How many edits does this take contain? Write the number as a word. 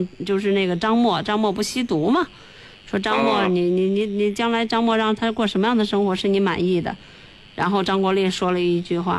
zero